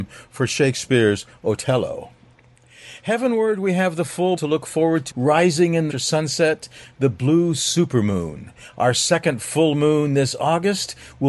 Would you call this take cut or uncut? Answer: cut